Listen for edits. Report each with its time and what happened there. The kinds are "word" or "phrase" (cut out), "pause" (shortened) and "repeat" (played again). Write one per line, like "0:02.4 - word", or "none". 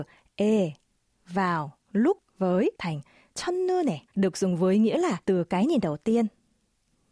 0:02.7 - pause
0:04.1 - pause
0:05.2 - pause